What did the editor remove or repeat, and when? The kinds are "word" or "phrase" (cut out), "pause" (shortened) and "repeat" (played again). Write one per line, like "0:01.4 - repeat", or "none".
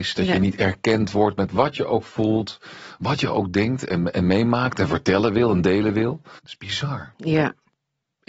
0:06.4 - pause